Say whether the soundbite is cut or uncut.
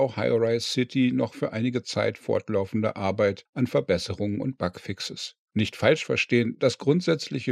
uncut